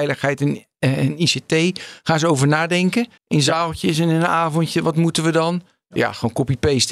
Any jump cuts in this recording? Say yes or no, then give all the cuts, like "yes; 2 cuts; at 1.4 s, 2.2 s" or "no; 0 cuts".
yes; 1 cut; at 3.2 s